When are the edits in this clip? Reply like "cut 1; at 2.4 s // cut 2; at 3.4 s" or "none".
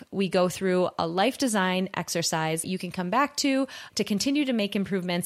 cut 1; at 2.6 s // cut 2; at 3.9 s